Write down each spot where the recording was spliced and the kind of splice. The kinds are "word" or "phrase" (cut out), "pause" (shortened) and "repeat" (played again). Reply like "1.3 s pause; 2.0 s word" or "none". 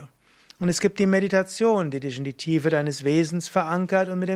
none